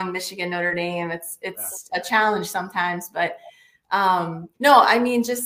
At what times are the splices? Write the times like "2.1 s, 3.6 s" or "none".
4.5 s